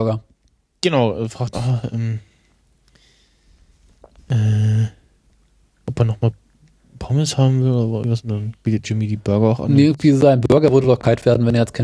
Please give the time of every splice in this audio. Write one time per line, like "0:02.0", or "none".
0:01.5
0:08.0
0:08.8